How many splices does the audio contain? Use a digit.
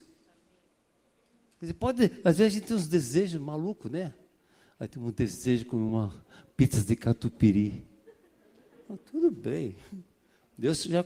0